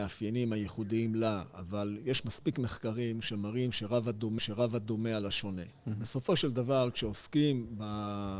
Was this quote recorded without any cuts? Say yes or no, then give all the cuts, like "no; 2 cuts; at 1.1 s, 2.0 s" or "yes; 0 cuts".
no; 1 cut; at 4.4 s